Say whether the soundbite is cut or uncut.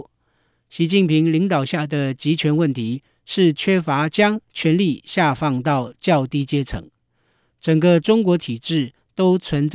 uncut